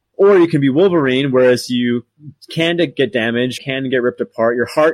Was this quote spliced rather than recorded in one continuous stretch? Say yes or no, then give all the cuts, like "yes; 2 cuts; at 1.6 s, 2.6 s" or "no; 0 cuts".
yes; 1 cut; at 3.6 s